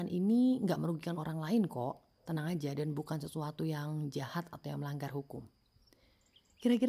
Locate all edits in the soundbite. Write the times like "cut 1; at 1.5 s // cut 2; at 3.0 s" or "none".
none